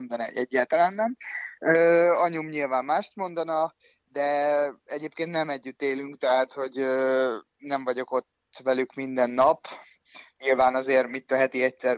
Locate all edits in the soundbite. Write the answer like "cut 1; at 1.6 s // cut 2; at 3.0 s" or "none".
none